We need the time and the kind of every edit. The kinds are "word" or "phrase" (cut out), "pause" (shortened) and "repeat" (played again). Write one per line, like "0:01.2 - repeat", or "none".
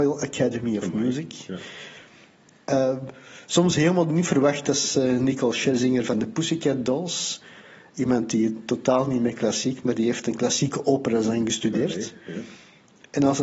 none

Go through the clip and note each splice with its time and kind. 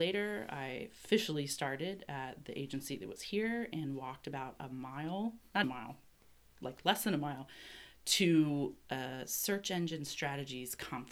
0:05.6 - word

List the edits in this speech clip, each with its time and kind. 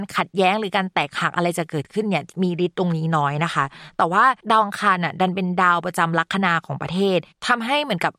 0:04.4 - pause

